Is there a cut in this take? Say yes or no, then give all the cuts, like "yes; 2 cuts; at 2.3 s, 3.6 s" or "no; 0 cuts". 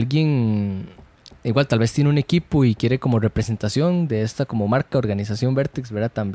no; 0 cuts